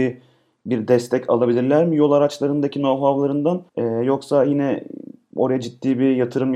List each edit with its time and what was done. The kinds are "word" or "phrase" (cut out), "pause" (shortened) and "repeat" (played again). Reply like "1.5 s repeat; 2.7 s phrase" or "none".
3.7 s pause